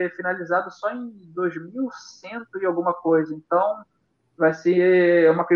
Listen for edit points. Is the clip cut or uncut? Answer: uncut